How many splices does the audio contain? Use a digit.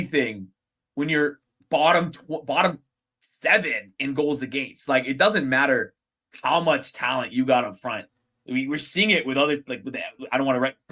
0